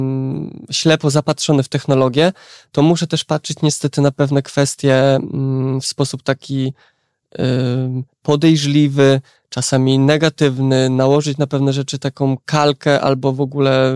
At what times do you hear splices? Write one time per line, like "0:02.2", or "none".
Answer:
none